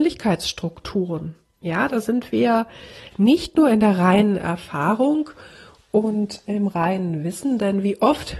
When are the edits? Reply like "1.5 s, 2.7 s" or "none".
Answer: none